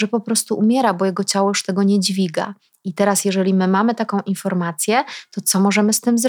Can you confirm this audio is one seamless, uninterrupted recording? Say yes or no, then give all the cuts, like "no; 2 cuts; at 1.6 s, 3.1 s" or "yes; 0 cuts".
yes; 0 cuts